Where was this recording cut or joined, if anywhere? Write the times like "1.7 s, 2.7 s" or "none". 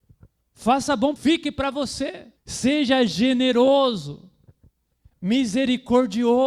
1.2 s, 2.4 s

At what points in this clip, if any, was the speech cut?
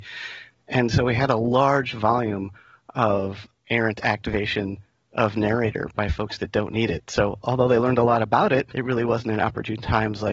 none

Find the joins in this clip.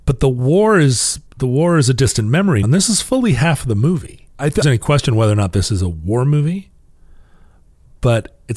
1.3 s, 2.6 s, 4.6 s

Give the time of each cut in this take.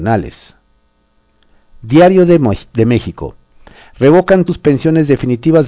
4.5 s

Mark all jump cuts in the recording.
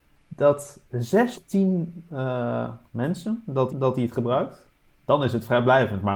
1.3 s, 2.9 s, 3.7 s, 4.9 s

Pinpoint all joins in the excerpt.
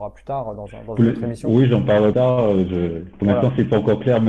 2.1 s

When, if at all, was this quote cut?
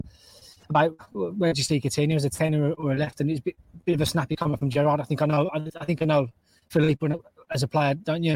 none

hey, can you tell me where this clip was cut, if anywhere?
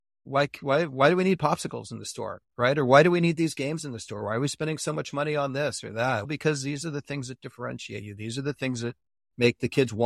none

